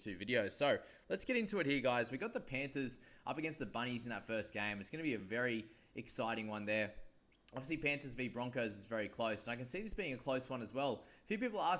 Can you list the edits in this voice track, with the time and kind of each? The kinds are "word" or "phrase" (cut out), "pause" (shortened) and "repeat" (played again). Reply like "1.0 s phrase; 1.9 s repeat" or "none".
none